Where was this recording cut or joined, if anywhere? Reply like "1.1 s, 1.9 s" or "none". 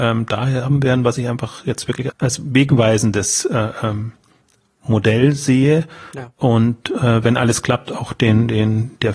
2.1 s